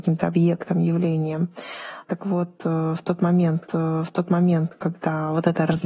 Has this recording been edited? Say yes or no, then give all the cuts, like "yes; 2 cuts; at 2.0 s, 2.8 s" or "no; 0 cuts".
yes; 1 cut; at 3.7 s